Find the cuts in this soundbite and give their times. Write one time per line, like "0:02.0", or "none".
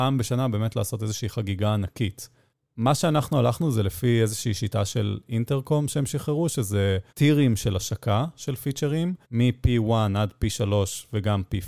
0:02.5
0:07.1
0:09.2